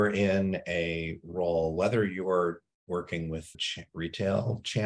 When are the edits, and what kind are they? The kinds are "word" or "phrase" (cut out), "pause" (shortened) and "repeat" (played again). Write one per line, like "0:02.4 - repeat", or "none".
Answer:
0:03.5 - word

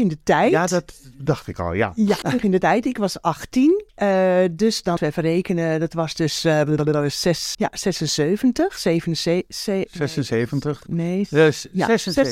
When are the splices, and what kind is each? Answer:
0:02.2 - word
0:03.9 - pause
0:05.0 - word
0:07.5 - word

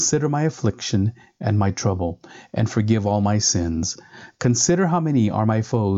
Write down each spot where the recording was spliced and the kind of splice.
none

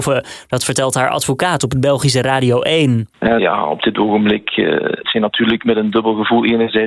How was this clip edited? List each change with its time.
0:03.4 - word
0:05.0 - word

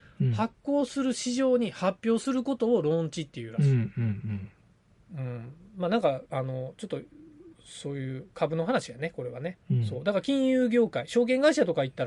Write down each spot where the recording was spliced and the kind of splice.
0:06.3 - pause
0:09.6 - pause

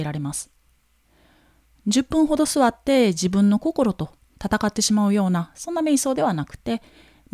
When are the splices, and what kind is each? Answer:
none

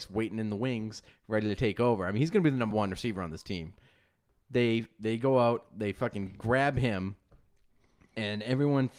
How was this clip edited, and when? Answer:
none

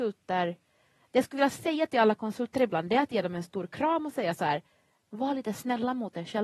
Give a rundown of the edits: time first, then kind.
none

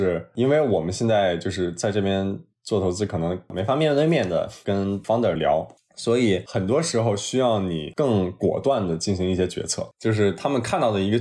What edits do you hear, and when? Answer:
none

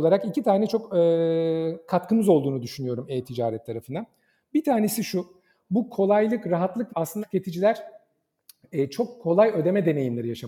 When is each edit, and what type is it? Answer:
0:06.9 - phrase
0:07.2 - word

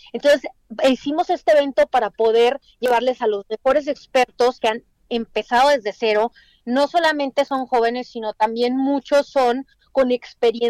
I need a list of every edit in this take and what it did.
none

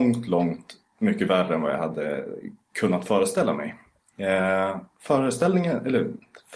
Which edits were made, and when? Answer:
none

